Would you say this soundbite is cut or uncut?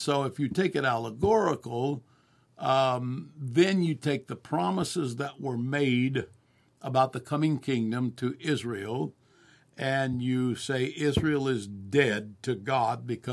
uncut